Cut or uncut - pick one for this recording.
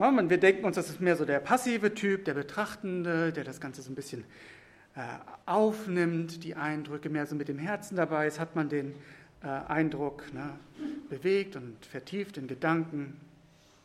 cut